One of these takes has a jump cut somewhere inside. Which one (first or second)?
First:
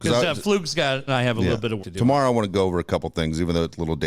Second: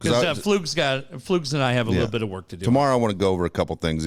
first